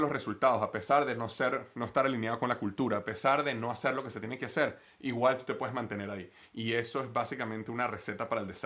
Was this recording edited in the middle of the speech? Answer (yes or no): no